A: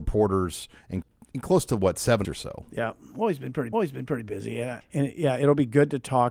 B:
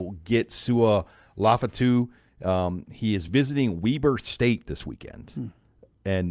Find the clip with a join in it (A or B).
A